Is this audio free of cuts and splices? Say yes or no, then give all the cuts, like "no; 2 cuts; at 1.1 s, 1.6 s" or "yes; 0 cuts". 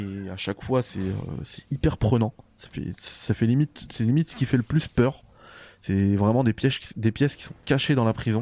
yes; 0 cuts